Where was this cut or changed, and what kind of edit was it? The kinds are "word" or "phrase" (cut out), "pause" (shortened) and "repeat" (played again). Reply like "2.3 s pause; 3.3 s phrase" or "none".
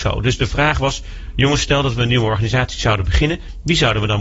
none